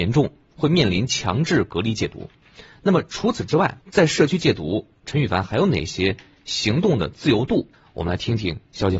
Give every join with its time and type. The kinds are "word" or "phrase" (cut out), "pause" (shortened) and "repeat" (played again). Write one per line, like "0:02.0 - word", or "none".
0:03.8 - pause
0:07.7 - pause

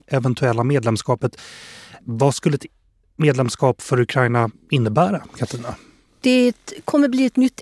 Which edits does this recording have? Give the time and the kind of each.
none

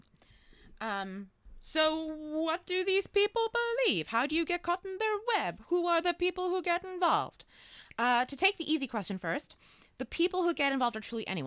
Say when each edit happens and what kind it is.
none

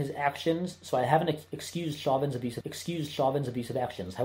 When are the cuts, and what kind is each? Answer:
0:02.6 - repeat

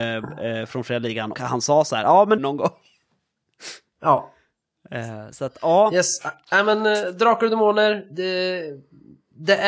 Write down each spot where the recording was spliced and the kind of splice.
0:01.3 - word
0:02.4 - phrase

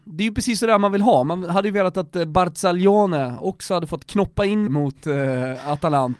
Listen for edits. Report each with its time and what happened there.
0:04.7 - phrase

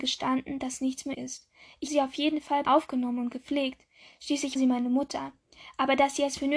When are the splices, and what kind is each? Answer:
0:01.1 - word
0:01.9 - word
0:02.7 - word
0:04.6 - word

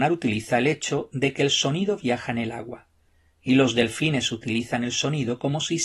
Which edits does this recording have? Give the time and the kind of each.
none

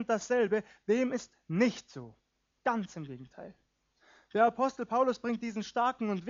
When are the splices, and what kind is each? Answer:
none

